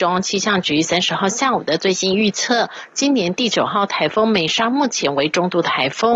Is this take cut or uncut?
uncut